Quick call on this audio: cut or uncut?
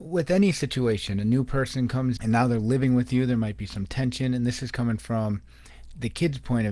cut